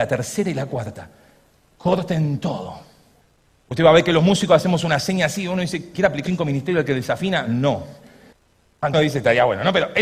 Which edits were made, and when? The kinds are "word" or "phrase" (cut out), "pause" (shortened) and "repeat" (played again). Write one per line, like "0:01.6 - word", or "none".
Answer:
0:05.9 - word
0:06.3 - word
0:08.9 - word

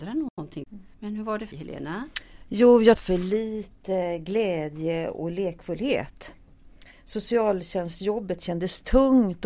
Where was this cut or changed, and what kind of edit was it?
0:00.9 - pause
0:01.5 - word
0:03.0 - phrase

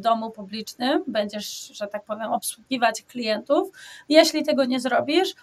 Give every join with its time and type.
none

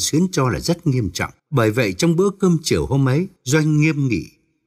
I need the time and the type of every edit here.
0:01.4 - pause
0:03.4 - pause

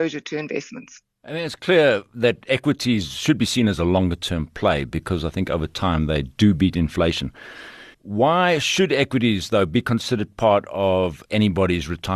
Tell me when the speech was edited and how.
0:07.9 - pause
0:11.3 - pause

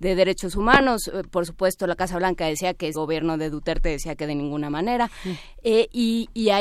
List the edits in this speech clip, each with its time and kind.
0:02.9 - phrase

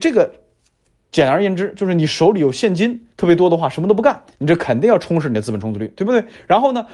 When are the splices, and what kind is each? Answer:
0:03.1 - pause
0:04.3 - pause

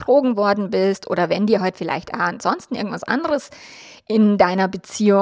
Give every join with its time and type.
none

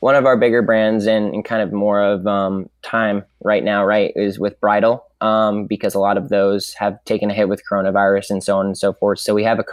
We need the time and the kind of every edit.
none

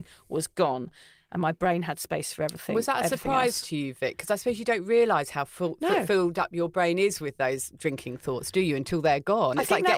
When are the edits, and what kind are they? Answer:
none

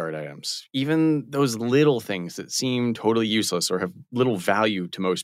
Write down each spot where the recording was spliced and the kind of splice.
none

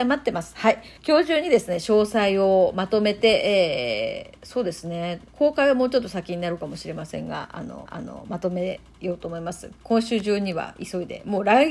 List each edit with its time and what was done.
0:01.0 - pause
0:05.3 - pause
0:07.9 - repeat

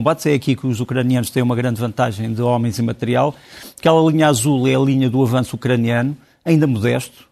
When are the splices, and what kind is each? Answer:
none

